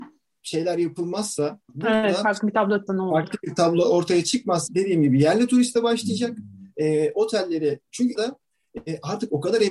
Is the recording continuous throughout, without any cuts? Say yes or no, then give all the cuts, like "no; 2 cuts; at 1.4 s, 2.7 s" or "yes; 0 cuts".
no; 4 cuts; at 1.6 s, 2.9 s, 4.7 s, 8.2 s